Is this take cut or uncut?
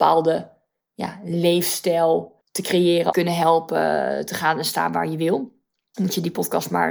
cut